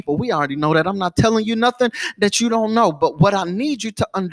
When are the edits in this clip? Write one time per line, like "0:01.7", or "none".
none